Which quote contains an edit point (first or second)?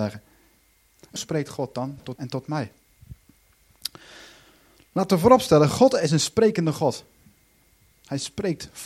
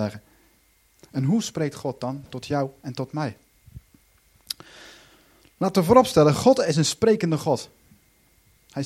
first